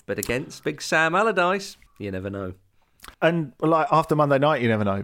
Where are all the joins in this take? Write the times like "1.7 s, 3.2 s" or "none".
1.9 s, 3.1 s

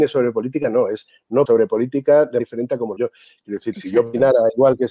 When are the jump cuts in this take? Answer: 1.4 s, 2.4 s, 3.0 s

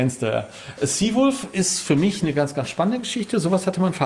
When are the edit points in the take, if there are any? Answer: none

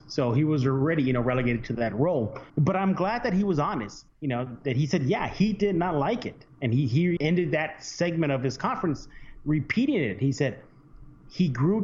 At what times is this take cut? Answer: 2.5 s, 4.1 s, 7.2 s

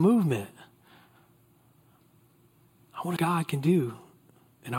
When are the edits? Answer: 3.2 s

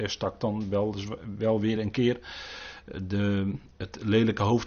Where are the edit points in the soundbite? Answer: none

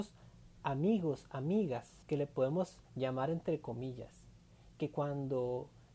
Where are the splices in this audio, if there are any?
2.0 s, 2.8 s

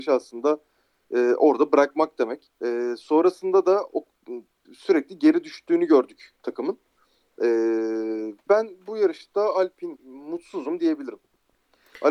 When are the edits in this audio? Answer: 2.6 s, 8.5 s, 10.0 s

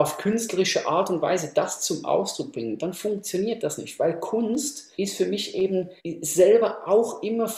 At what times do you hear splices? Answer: 4.9 s, 6.0 s

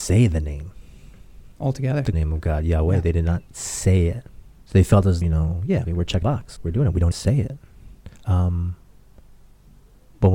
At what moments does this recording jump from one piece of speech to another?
1.5 s, 2.1 s, 4.7 s, 5.2 s, 5.8 s, 6.2 s, 6.6 s, 7.1 s, 8.2 s

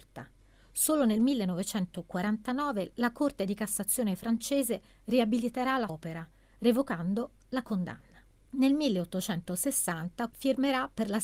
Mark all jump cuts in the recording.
5.9 s, 8.4 s, 10.3 s

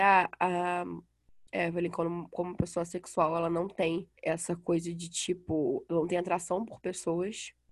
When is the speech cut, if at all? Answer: 4.2 s

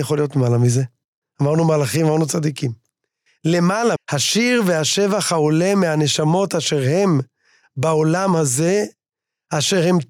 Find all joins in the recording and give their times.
4.0 s

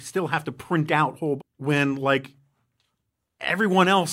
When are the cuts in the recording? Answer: 1.4 s

